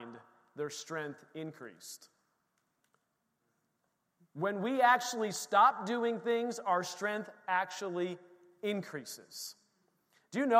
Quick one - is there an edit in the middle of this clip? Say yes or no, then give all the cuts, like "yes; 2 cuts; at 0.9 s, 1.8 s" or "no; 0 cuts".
no; 0 cuts